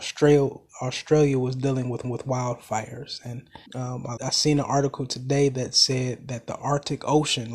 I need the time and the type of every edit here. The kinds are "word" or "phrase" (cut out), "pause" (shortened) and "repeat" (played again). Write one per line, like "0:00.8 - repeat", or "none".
0:02.0 - repeat
0:03.7 - pause
0:04.2 - word